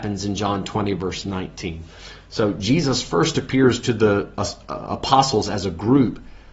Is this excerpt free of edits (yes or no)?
yes